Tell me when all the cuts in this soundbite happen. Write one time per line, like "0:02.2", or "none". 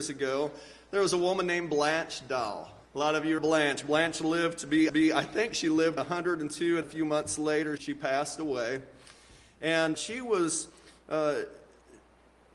0:02.8
0:03.4
0:04.9
0:06.0
0:06.8
0:07.8
0:09.9